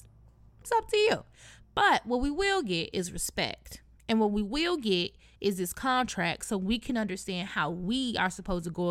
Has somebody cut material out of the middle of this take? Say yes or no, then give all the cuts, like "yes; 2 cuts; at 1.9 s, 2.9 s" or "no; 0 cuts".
no; 0 cuts